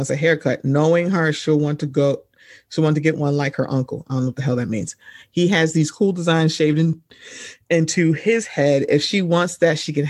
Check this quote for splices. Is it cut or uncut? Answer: uncut